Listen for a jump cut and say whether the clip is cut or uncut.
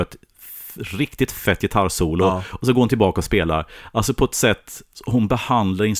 uncut